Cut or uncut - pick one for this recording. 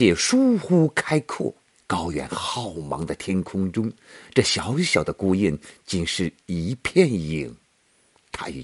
cut